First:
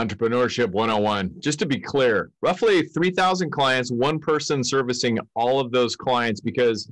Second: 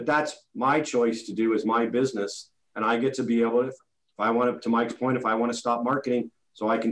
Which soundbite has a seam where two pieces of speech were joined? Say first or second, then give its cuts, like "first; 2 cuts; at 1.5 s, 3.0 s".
first; 1 cut; at 2.4 s